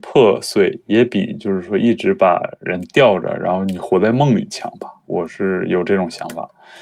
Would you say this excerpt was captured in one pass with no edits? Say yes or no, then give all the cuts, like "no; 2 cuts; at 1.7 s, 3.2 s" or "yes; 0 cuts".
no; 1 cut; at 2.6 s